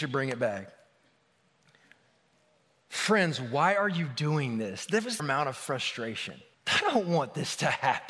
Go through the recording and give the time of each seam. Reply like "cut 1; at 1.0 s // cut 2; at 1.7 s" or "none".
cut 1; at 5.2 s // cut 2; at 6.5 s